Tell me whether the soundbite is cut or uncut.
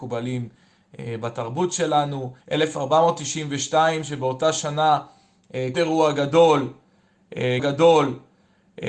cut